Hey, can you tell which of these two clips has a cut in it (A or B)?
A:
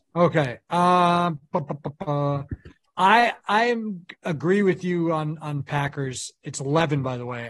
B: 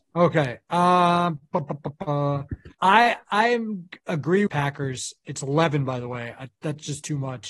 B